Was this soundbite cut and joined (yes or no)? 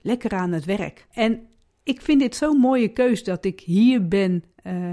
yes